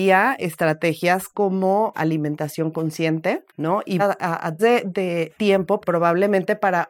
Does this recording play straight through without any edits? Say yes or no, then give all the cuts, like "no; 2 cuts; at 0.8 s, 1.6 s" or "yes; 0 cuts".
no; 6 cuts; at 1.9 s, 3.5 s, 4.0 s, 4.6 s, 5.3 s, 5.8 s